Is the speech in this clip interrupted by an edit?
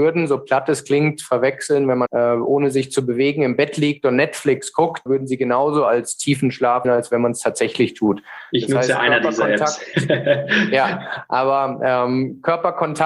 yes; 3 cuts; at 2.1 s, 5.1 s, 6.8 s

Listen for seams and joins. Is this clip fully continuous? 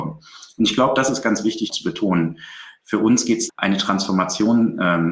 no; 2 cuts; at 1.7 s, 3.5 s

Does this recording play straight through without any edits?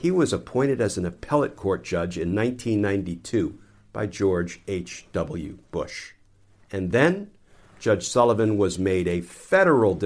yes; 0 cuts

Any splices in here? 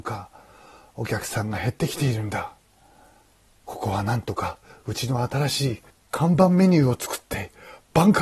no; 0 cuts

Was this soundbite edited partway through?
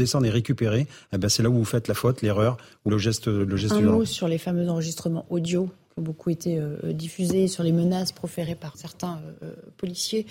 yes; 2 cuts; at 2.9 s, 8.7 s

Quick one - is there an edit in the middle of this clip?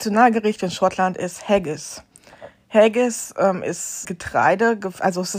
yes; 1 cut; at 4.0 s

